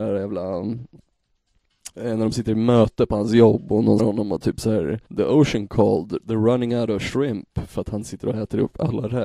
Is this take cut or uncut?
cut